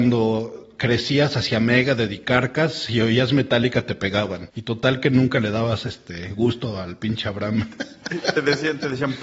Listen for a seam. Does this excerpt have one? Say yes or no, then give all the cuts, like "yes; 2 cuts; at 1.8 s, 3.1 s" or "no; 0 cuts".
no; 0 cuts